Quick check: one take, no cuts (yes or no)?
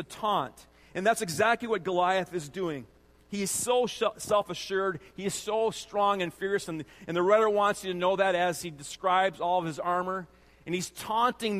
yes